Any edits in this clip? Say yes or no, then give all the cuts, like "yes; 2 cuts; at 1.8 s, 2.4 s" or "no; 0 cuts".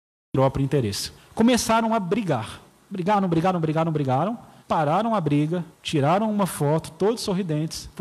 yes; 4 cuts; at 1.2 s, 2.7 s, 4.6 s, 5.7 s